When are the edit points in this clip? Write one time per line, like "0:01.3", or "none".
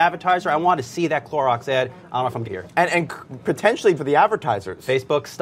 0:02.4
0:04.0